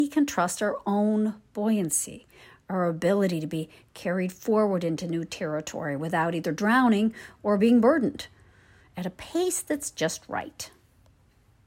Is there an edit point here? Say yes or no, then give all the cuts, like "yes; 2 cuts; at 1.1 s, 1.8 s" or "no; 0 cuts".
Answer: no; 0 cuts